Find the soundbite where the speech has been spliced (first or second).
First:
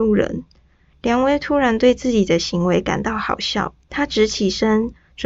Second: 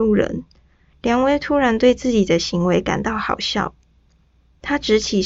first